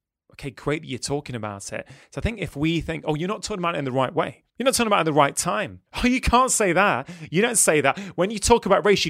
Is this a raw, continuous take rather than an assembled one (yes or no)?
no